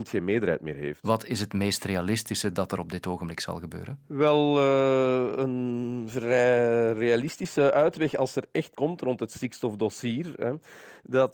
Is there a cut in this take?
yes; 1 cut; at 8.7 s

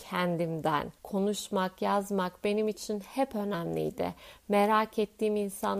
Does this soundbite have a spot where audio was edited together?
yes; 1 cut; at 1.0 s

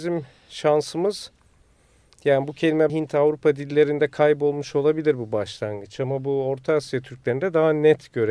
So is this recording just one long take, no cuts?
no; 1 cut; at 2.9 s

